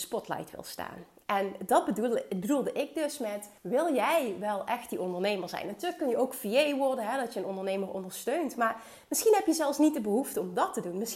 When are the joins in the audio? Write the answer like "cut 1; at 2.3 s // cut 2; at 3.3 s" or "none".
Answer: cut 1; at 3.6 s